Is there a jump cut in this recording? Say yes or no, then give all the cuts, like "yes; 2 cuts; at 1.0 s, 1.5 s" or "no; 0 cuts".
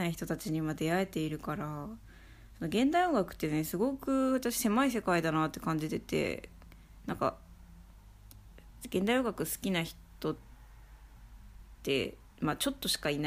yes; 1 cut; at 12.3 s